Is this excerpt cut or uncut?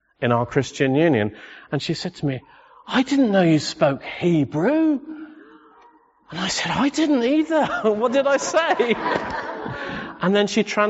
uncut